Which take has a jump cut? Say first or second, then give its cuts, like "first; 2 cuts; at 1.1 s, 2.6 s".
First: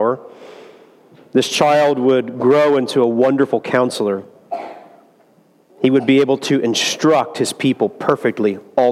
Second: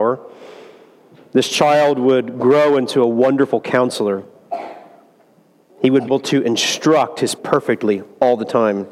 second; 2 cuts; at 6.1 s, 7.4 s